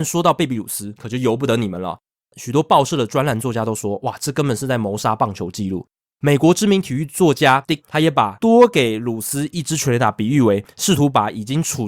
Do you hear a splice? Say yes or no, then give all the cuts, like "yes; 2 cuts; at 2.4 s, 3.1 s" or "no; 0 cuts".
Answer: yes; 1 cut; at 7.8 s